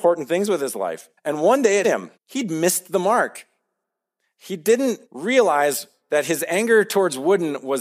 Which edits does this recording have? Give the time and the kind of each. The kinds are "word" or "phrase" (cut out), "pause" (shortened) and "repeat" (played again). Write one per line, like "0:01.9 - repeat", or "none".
0:01.2 - pause
0:01.8 - word
0:02.2 - pause
0:05.1 - pause